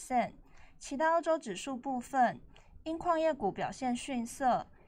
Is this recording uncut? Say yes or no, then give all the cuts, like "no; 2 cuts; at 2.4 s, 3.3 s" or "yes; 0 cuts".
yes; 0 cuts